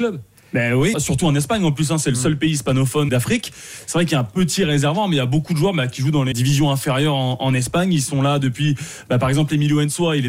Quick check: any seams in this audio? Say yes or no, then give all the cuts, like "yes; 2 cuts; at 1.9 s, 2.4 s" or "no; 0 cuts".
yes; 3 cuts; at 0.9 s, 3.1 s, 6.3 s